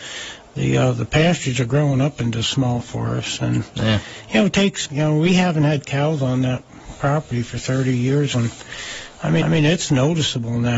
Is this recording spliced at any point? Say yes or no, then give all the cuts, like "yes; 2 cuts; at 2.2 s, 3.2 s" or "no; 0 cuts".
yes; 3 cuts; at 4.8 s, 8.3 s, 9.4 s